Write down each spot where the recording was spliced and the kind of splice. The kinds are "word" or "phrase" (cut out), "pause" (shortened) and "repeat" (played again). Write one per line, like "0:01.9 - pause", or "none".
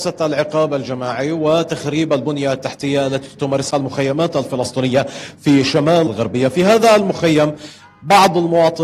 0:03.7 - word
0:06.1 - word